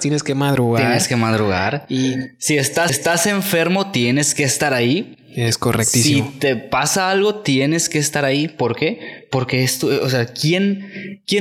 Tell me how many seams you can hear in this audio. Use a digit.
1